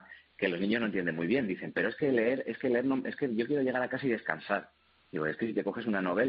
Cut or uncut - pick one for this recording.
uncut